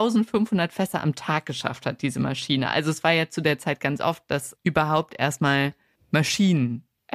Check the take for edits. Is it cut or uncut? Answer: uncut